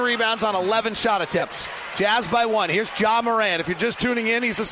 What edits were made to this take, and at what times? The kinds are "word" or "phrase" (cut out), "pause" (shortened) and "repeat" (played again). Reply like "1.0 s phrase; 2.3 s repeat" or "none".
none